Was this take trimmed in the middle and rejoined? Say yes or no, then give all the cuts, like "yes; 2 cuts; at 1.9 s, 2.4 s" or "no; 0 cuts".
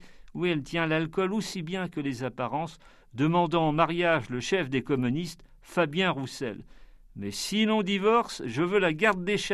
no; 0 cuts